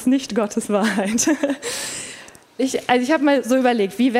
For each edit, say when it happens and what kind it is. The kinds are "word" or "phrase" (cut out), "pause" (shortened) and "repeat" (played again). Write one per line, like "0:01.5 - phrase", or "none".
0:02.6 - word